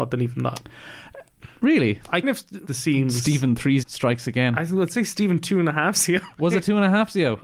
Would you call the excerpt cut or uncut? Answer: cut